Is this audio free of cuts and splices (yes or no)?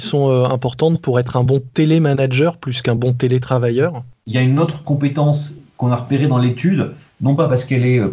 yes